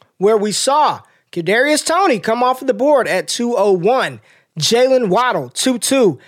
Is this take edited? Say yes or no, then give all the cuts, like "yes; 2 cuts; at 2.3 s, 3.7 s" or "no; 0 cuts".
no; 0 cuts